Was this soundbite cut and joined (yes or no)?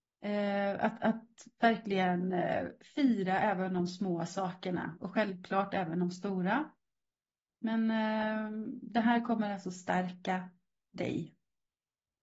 no